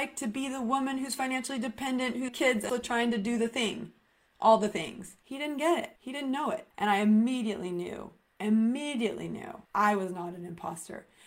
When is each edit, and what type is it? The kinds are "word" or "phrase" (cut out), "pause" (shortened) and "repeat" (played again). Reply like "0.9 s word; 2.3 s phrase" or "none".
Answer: 2.3 s phrase; 2.7 s word; 5.2 s pause; 6.0 s pause; 6.7 s pause; 9.7 s pause